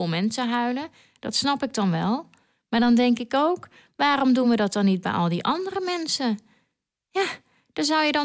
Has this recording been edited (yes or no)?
no